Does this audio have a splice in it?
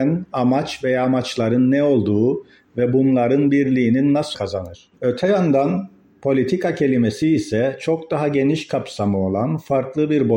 yes; 2 cuts; at 4.3 s, 5.0 s

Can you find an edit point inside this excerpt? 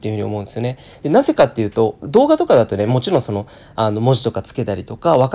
no; 0 cuts

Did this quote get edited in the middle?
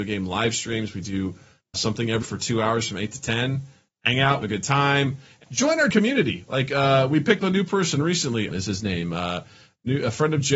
yes; 7 cuts; at 1.7 s, 2.2 s, 4.4 s, 5.4 s, 5.9 s, 7.4 s, 8.5 s

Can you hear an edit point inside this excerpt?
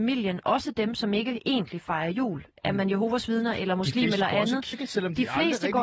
yes; 1 cut; at 4.7 s

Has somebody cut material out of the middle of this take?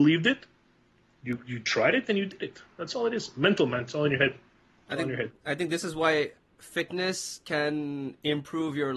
no; 0 cuts

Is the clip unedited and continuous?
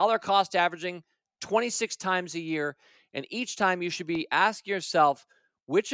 yes; 0 cuts

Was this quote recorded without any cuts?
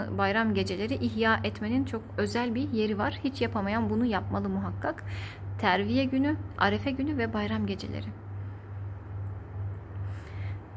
yes; 0 cuts

